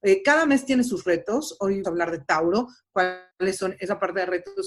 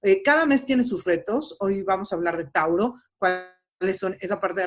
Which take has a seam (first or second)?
first